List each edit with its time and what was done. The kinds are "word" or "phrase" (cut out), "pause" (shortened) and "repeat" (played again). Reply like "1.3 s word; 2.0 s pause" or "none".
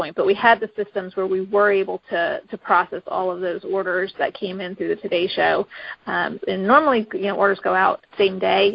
6.4 s word